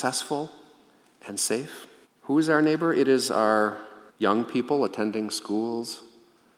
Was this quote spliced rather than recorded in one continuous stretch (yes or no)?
yes